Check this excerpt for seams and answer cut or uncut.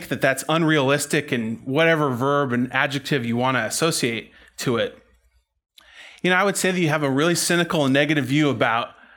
uncut